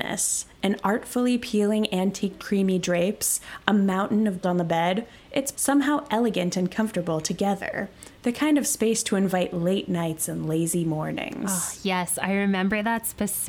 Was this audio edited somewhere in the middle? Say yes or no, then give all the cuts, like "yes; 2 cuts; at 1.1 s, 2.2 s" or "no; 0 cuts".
yes; 3 cuts; at 2.4 s, 4.4 s, 5.5 s